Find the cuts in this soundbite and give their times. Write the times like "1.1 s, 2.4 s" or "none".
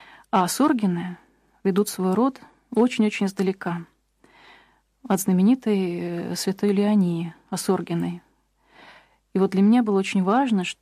none